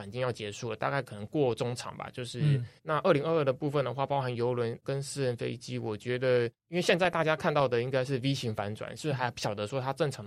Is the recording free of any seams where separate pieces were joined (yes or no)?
no